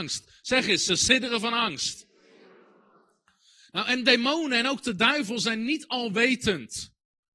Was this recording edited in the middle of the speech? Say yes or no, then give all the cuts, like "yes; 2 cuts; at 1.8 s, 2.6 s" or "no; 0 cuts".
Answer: no; 0 cuts